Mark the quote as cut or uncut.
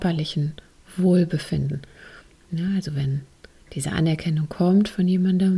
uncut